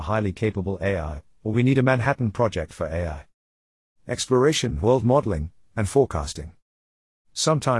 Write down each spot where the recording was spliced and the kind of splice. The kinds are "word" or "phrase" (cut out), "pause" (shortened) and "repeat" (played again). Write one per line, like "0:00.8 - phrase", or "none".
none